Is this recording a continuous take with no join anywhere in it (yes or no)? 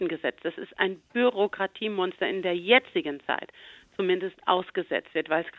yes